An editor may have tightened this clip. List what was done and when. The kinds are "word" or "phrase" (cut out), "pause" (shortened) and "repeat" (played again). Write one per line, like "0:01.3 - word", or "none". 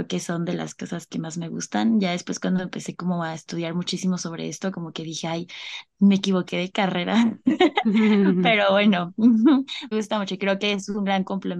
0:09.9 - word